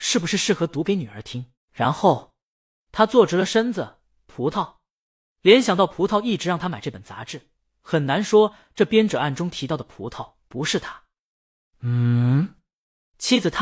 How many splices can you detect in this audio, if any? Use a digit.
1